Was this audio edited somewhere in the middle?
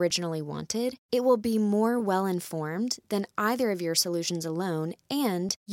no; 0 cuts

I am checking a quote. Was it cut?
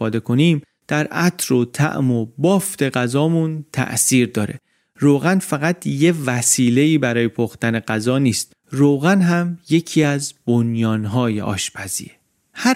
no; 0 cuts

